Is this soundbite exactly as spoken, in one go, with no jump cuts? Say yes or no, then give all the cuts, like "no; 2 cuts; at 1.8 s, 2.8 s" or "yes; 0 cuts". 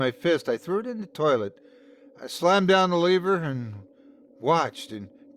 yes; 0 cuts